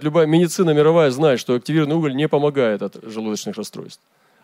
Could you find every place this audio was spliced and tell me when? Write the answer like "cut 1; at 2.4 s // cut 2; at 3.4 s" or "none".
none